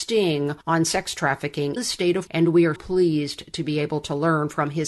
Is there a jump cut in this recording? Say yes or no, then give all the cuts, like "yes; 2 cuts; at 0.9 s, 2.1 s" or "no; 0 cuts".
yes; 3 cuts; at 1.8 s, 2.3 s, 2.8 s